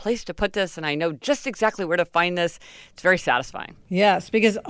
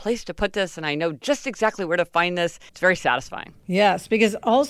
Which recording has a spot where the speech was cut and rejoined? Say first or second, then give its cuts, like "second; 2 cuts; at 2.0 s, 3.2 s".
second; 1 cut; at 2.7 s